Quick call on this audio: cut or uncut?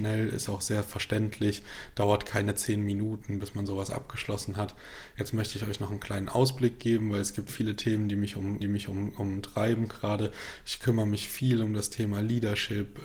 cut